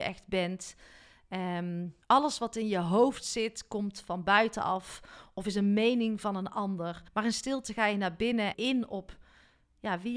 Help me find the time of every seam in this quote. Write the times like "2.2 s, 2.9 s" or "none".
2.0 s, 7.1 s, 8.5 s

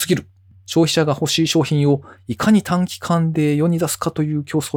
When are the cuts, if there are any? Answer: none

